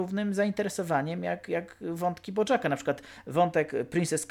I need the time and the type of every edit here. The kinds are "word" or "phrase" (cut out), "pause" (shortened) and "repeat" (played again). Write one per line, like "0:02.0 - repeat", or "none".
none